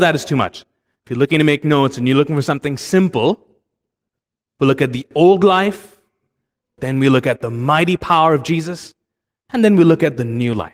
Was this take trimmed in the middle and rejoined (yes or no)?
no